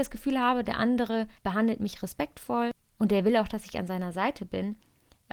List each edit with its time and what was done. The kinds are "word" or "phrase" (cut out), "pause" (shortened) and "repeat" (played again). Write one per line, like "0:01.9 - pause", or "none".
0:01.4 - pause